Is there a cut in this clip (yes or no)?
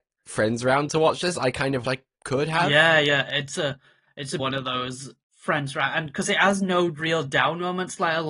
yes